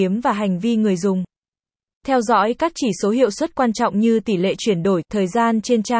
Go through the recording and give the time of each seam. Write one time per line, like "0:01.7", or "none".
none